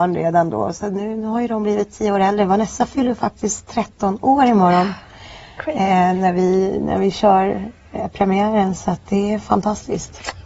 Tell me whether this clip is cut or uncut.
uncut